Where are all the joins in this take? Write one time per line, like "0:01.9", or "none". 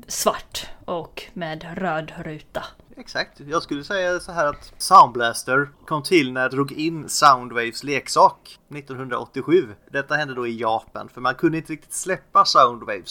0:05.7
0:06.5
0:09.8